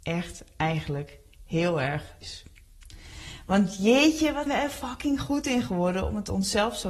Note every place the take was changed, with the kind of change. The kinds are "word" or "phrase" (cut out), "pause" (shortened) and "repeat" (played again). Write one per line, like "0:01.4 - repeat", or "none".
0:02.2 - word
0:04.5 - word